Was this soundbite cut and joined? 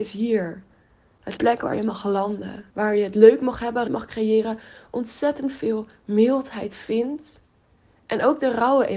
yes; 3 cuts; at 1.4 s, 2.7 s, 3.9 s

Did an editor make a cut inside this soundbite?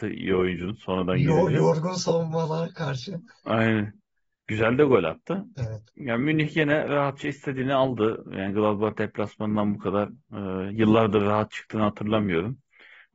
no; 0 cuts

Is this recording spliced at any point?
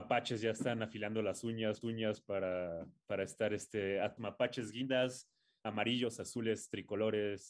yes; 2 cuts; at 1.8 s, 4.2 s

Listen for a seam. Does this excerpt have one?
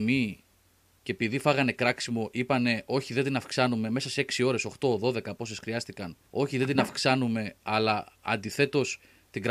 yes; 1 cut; at 6.3 s

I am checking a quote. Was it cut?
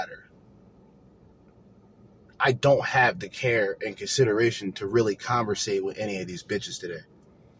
no; 0 cuts

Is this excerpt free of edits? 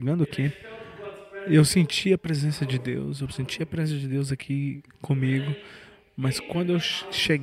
yes; 0 cuts

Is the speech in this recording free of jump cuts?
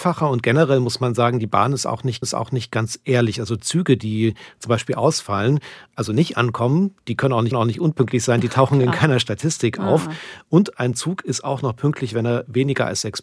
no; 2 cuts; at 2.2 s, 7.5 s

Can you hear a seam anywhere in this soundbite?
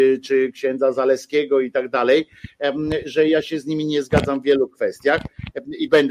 no; 0 cuts

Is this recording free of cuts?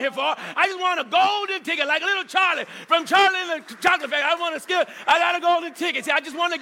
yes; 0 cuts

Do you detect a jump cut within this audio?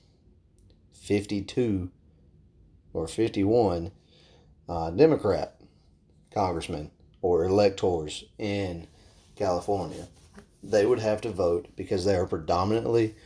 no; 0 cuts

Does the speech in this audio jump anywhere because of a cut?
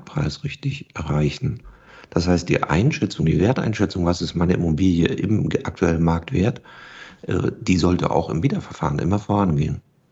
no; 0 cuts

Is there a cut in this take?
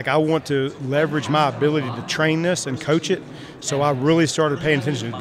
no; 0 cuts

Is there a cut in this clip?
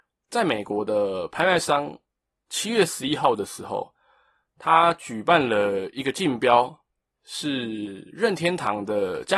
no; 0 cuts

